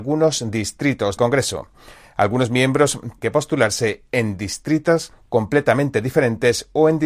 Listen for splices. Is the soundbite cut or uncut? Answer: cut